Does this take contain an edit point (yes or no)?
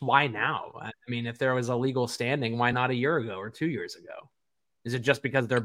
no